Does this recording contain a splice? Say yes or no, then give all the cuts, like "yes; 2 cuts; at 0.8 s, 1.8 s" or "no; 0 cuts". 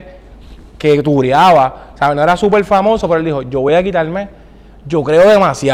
no; 0 cuts